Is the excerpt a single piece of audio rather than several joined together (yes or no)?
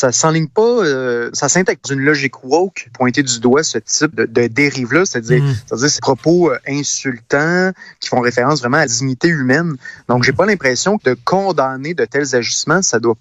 no